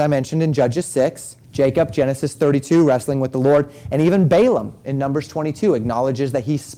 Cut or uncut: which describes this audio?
cut